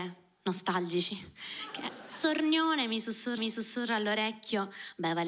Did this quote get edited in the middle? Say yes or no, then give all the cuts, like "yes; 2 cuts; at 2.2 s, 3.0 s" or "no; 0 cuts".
yes; 1 cut; at 3.4 s